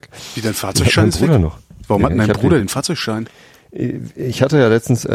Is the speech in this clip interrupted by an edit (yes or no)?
no